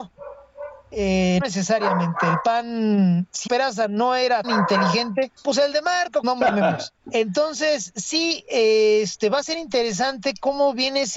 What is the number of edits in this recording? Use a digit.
6